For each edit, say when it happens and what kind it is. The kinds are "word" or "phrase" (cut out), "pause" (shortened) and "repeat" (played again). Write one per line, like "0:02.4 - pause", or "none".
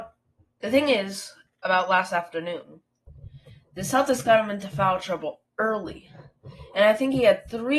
0:01.5 - pause